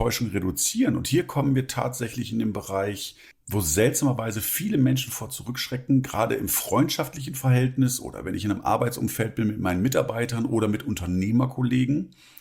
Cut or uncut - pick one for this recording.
cut